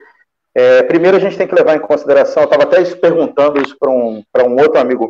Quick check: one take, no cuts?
yes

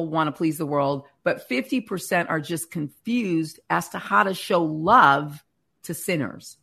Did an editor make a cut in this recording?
no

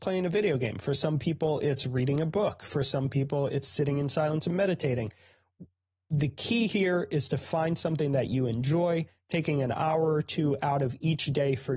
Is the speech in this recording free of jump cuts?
yes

